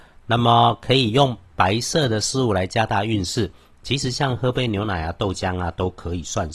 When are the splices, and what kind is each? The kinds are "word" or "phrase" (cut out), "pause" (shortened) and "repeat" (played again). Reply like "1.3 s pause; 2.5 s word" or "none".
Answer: none